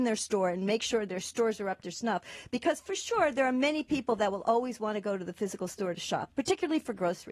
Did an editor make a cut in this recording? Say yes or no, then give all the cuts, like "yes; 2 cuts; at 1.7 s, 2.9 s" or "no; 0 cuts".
no; 0 cuts